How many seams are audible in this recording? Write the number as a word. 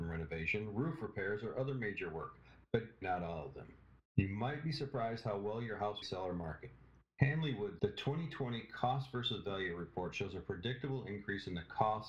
four